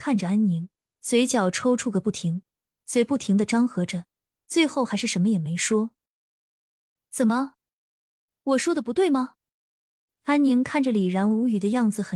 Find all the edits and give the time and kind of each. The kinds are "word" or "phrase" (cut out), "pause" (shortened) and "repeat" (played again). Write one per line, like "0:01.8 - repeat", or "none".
none